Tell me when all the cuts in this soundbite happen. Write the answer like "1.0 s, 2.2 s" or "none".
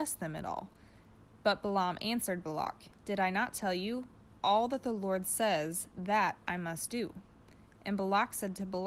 4.4 s